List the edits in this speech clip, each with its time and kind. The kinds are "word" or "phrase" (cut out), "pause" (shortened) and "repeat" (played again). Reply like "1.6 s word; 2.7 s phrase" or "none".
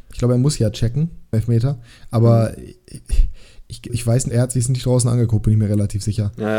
1.3 s word; 3.9 s word; 4.3 s word